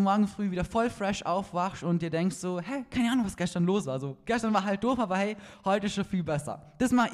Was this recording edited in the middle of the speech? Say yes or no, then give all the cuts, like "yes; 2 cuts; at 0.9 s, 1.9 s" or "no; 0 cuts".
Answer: no; 0 cuts